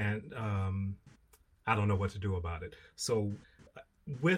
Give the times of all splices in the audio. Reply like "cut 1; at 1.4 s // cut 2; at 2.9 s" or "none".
none